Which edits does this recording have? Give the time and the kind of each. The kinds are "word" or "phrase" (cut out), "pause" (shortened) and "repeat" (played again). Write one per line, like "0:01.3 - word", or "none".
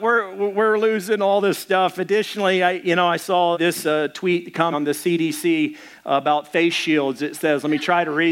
0:03.5 - word
0:04.7 - phrase